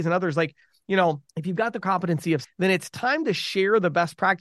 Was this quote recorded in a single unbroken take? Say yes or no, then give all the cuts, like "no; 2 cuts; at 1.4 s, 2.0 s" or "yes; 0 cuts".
no; 3 cuts; at 1.3 s, 1.8 s, 2.4 s